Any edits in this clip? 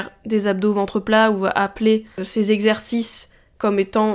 no; 0 cuts

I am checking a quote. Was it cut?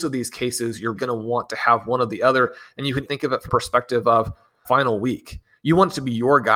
yes; 4 cuts; at 1.0 s, 3.0 s, 3.5 s, 4.6 s

